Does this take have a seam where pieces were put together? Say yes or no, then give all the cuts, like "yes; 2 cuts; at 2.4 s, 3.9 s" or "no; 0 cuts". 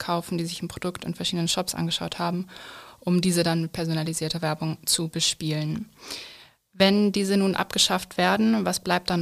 no; 0 cuts